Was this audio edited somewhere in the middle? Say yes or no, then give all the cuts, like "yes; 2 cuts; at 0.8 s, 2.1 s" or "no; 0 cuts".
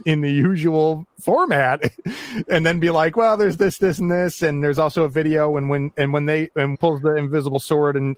yes; 2 cuts; at 3.6 s, 6.7 s